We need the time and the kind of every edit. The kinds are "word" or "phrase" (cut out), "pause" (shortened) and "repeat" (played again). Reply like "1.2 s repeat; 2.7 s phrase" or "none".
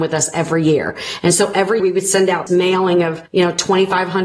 1.8 s word; 2.5 s word; 3.3 s pause